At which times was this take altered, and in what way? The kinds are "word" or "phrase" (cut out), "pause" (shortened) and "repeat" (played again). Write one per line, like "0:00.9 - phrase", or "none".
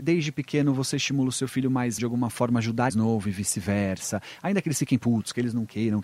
0:02.0 - word
0:02.9 - phrase